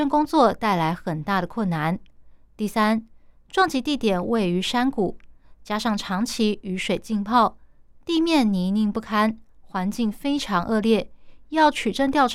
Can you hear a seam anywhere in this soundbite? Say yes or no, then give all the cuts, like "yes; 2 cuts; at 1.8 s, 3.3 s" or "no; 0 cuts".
no; 0 cuts